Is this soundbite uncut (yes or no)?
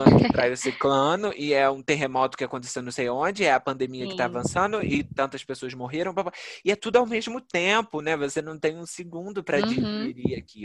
yes